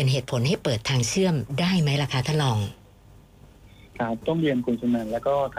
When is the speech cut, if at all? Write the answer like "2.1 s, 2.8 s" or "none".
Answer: none